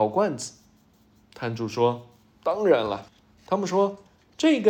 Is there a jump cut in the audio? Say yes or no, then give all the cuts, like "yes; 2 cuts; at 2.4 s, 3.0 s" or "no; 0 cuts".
yes; 1 cut; at 3.1 s